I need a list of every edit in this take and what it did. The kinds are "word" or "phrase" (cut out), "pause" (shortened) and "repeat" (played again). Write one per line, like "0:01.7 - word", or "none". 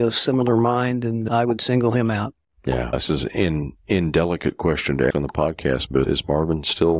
0:05.1 - word
0:06.0 - word